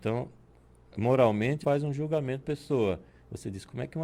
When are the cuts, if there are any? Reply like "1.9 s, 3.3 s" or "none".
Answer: 1.6 s, 2.4 s